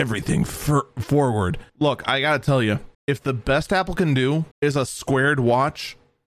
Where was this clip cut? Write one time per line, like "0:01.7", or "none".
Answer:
0:01.7
0:02.9
0:04.5